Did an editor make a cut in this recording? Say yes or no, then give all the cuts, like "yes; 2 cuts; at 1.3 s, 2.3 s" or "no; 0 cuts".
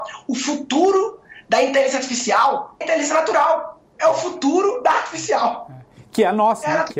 yes; 1 cut; at 2.8 s